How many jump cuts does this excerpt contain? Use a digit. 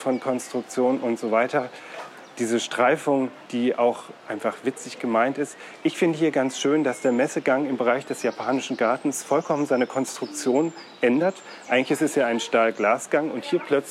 1